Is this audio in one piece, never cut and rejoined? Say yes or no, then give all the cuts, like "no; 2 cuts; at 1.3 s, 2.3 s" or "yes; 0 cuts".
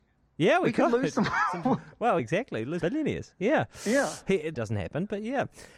no; 3 cuts; at 2.2 s, 2.8 s, 4.5 s